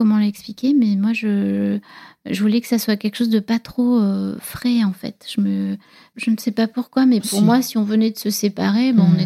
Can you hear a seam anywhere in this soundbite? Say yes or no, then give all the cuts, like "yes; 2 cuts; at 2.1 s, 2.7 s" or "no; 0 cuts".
no; 0 cuts